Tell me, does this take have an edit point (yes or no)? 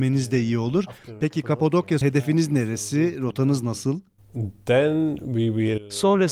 yes